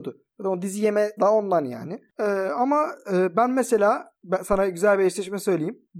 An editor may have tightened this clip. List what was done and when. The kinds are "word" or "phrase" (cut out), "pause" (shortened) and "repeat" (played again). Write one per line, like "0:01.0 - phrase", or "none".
0:01.2 - phrase
0:02.1 - pause

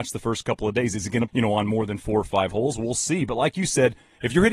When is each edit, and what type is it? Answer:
0:01.3 - phrase

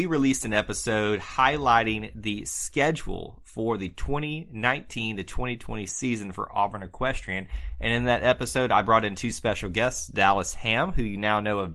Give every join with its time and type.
none

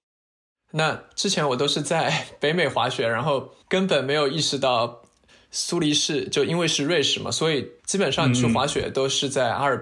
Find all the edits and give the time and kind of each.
0:03.6 - pause
0:07.8 - pause

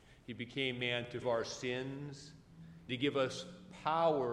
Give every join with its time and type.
0:01.2 - word
0:02.9 - word

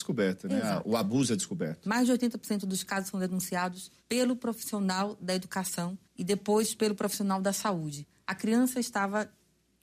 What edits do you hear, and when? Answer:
0:04.0 - pause
0:06.1 - pause

